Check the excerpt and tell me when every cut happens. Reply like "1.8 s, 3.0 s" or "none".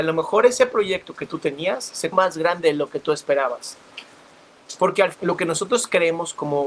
2.1 s, 5.1 s